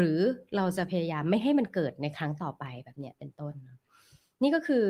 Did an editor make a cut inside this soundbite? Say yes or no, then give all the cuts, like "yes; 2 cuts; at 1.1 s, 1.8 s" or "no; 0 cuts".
no; 0 cuts